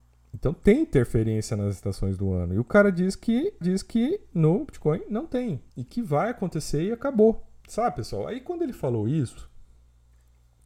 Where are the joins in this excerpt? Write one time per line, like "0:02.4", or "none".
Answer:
0:03.6
0:05.7
0:07.6